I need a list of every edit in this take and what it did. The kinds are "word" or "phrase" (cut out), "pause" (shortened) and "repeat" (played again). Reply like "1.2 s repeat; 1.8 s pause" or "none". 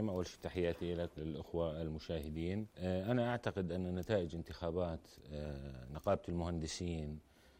1.2 s word; 2.7 s pause